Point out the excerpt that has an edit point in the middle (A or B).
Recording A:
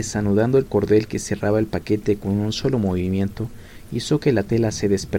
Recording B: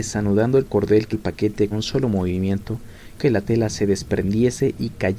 B